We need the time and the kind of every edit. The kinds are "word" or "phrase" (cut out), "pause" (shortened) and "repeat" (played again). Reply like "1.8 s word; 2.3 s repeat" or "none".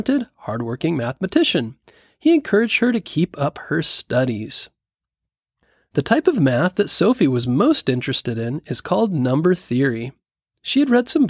none